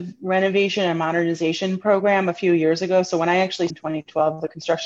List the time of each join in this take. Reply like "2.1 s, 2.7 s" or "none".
3.7 s